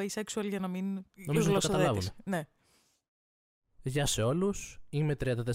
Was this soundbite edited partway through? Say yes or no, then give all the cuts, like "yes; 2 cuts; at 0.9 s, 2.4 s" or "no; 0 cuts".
yes; 1 cut; at 1.1 s